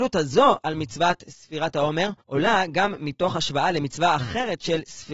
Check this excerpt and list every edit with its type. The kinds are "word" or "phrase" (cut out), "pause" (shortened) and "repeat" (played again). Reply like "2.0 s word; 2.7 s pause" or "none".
2.2 s pause